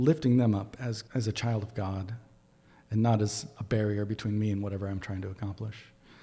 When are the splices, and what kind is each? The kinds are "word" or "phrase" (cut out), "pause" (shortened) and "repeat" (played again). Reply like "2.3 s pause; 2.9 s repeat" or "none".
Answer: 1.1 s pause